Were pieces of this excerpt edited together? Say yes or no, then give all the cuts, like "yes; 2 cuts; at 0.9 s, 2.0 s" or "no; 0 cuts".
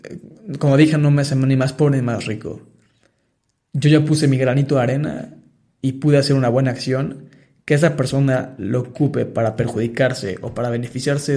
no; 0 cuts